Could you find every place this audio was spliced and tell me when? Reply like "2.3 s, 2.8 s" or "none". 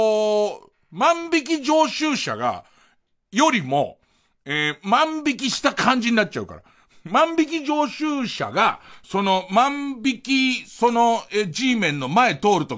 none